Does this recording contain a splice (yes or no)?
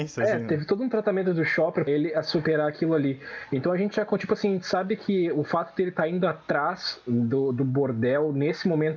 yes